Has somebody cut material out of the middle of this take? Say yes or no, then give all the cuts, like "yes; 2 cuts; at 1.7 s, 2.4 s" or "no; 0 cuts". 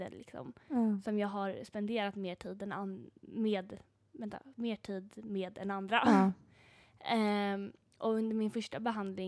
yes; 1 cut; at 4.5 s